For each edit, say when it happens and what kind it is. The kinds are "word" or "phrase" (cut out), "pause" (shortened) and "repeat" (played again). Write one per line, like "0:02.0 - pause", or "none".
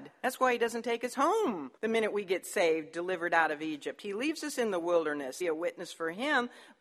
0:01.8 - pause
0:05.4 - phrase